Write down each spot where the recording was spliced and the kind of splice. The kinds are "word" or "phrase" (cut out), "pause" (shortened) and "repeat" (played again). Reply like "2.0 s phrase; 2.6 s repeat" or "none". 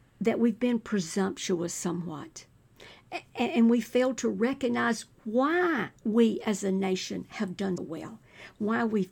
3.3 s pause; 7.8 s word

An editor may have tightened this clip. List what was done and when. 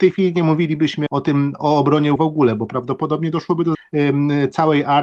1.1 s word; 2.2 s word; 3.7 s word

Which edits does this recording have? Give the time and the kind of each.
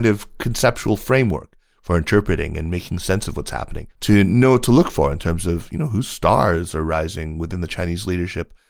3.9 s pause

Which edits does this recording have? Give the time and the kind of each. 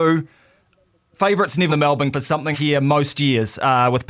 1.7 s word; 2.1 s word; 2.5 s word

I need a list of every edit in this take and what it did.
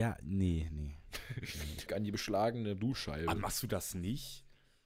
1.9 s phrase

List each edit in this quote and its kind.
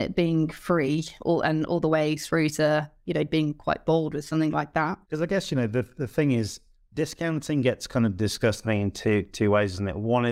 3.0 s pause; 5.0 s pause; 6.7 s pause

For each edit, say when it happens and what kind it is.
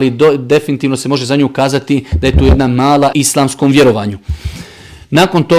3.1 s phrase

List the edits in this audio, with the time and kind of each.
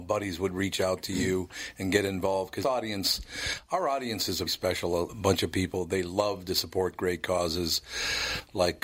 2.6 s word; 4.5 s word; 5.1 s word

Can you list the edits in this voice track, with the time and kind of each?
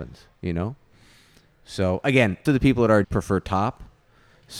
2.5 s word; 3.0 s word

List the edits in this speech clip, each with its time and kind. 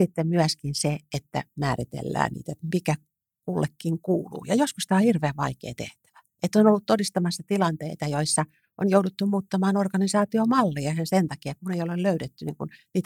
none

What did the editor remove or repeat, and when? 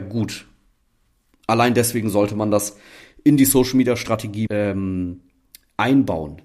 4.5 s word

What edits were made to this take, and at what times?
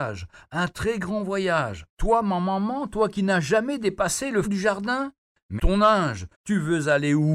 1.9 s pause; 4.4 s word; 5.6 s word; 6.3 s pause

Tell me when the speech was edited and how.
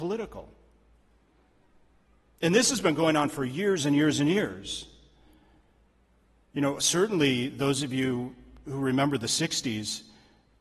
none

